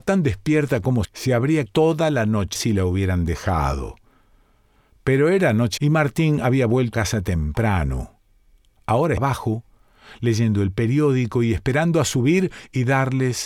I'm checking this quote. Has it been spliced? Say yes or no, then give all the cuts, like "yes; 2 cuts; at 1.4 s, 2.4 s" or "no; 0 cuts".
yes; 6 cuts; at 1.0 s, 1.7 s, 2.5 s, 5.8 s, 6.9 s, 9.2 s